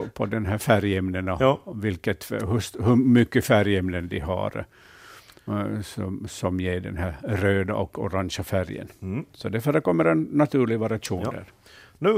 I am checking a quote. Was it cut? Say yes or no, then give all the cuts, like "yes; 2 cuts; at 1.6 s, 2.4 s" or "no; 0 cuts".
no; 0 cuts